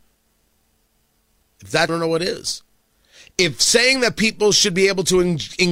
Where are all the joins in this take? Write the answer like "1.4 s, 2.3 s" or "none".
1.9 s